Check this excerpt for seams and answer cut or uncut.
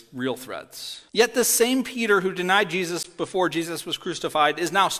cut